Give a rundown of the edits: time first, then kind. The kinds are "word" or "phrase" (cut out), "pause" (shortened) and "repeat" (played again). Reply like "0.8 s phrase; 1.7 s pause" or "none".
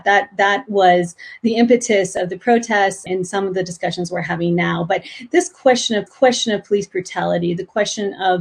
3.1 s word; 6.1 s repeat